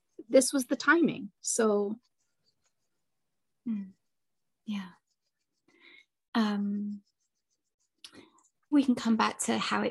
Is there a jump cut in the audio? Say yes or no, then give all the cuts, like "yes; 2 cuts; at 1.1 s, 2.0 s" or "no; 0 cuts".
yes; 2 cuts; at 4.0 s, 8.7 s